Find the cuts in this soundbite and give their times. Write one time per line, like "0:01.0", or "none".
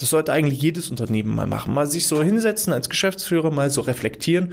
none